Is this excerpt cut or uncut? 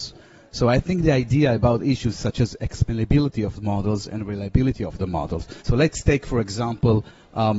cut